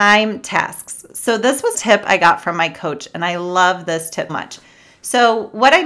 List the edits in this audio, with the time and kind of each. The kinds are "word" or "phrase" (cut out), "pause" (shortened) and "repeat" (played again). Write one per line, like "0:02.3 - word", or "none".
0:01.7 - word
0:04.3 - word